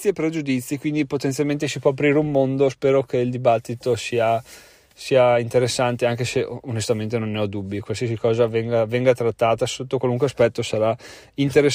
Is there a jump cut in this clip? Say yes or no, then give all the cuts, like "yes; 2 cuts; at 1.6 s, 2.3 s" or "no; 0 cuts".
no; 0 cuts